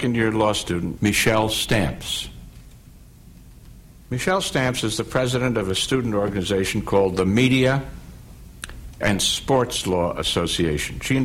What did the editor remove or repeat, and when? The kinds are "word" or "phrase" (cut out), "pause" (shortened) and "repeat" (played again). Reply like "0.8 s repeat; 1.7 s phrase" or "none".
1.0 s word; 9.0 s word